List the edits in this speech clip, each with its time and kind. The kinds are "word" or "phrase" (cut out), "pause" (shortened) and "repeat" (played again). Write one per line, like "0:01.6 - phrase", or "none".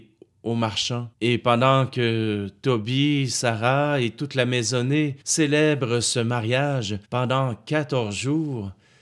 0:01.1 - pause
0:05.2 - pause
0:07.0 - pause